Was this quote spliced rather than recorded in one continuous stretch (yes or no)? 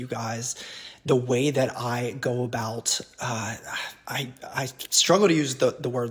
no